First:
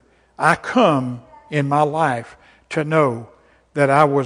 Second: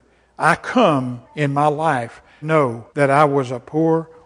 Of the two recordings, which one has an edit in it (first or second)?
second